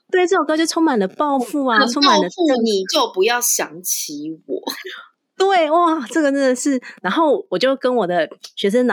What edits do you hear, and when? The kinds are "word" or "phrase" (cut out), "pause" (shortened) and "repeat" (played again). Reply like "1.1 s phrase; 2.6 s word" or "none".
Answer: none